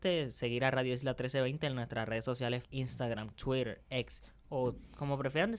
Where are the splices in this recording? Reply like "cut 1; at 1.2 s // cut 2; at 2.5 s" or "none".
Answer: cut 1; at 2.6 s

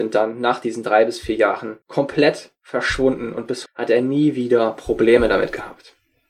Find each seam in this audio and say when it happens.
cut 1; at 1.8 s // cut 2; at 3.7 s

